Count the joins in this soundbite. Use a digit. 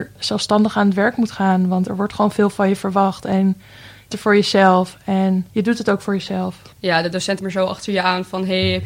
3